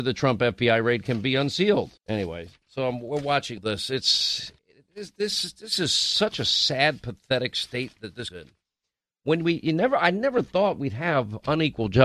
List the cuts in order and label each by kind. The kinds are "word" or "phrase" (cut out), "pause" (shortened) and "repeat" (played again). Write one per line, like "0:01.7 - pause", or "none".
0:02.0 - pause
0:03.6 - word
0:04.6 - pause
0:08.3 - phrase

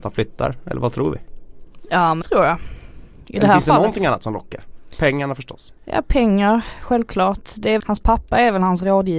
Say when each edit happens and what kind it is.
0:02.2 - word
0:05.8 - pause
0:07.8 - phrase

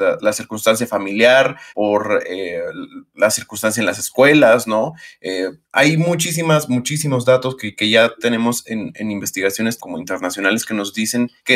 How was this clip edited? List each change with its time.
0:01.7 - pause
0:09.8 - phrase

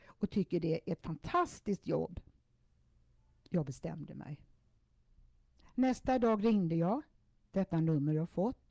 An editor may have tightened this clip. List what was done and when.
none

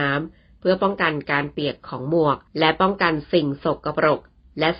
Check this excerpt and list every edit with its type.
0:02.5 - pause

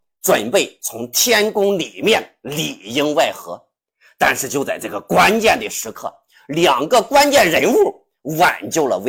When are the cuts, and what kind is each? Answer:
none

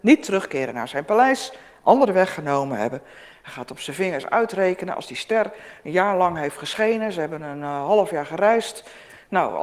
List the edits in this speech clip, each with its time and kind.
none

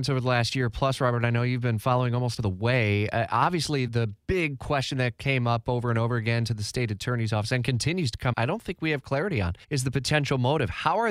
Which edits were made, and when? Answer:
0:02.4 - phrase
0:03.9 - phrase
0:08.3 - word
0:09.6 - pause

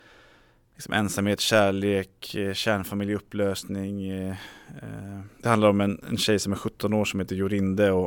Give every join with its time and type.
0:05.3 - pause

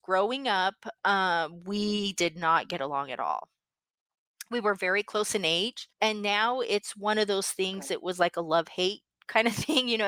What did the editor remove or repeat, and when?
0:05.9 - pause

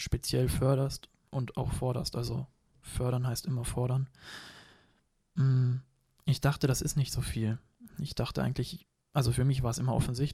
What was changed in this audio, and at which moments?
none

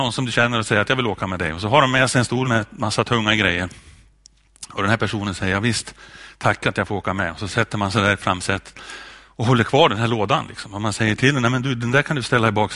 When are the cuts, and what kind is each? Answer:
0:02.4 - word

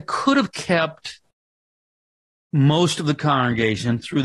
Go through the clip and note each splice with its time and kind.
none

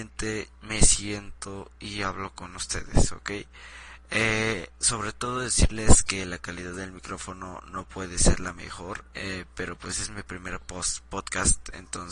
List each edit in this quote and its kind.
0:09.1 - pause

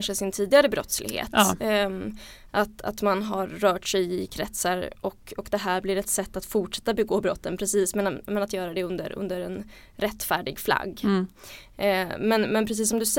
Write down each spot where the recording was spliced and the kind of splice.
none

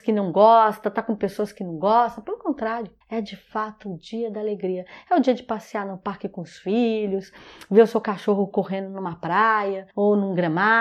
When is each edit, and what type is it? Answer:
0:03.0 - pause
0:09.9 - pause

